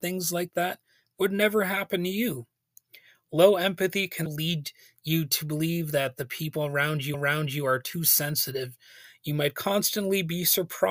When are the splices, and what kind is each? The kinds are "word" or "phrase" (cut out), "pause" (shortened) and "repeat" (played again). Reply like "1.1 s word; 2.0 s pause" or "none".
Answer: 4.3 s word; 7.1 s repeat